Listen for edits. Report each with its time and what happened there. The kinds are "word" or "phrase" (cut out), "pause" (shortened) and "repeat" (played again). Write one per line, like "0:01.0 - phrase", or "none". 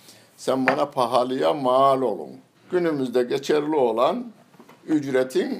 0:02.5 - pause